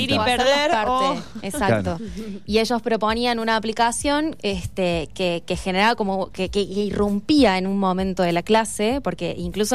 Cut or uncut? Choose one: uncut